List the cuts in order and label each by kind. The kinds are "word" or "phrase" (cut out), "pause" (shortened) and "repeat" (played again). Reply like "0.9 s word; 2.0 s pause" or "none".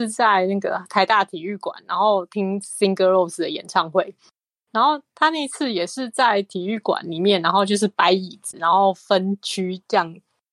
none